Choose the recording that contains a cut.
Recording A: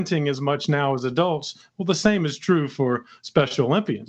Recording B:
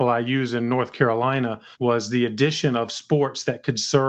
B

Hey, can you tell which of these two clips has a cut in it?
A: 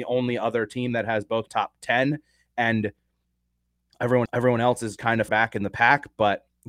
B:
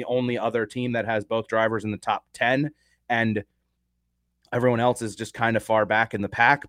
A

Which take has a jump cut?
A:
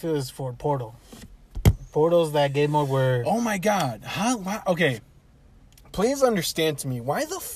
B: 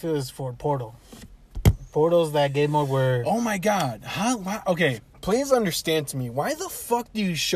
B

